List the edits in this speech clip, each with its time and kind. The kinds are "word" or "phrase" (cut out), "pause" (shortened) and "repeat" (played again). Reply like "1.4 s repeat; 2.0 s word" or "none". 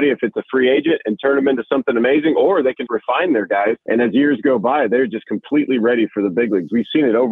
2.9 s word; 3.8 s pause